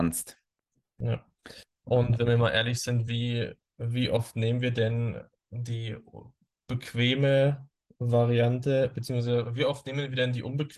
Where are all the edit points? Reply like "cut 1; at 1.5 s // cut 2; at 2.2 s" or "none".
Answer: none